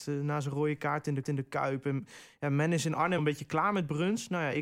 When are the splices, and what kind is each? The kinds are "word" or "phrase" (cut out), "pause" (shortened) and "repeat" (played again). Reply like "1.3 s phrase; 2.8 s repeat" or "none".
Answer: 1.2 s repeat; 3.2 s word